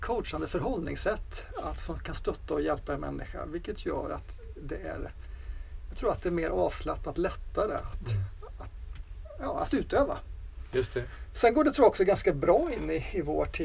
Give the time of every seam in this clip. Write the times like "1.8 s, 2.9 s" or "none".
none